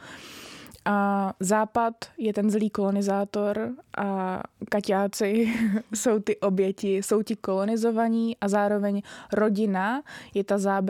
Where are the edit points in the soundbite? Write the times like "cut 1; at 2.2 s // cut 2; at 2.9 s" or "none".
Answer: none